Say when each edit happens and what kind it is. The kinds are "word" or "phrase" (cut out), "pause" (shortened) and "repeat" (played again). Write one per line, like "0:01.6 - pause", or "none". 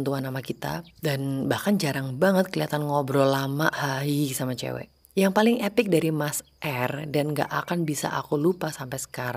0:00.9 - pause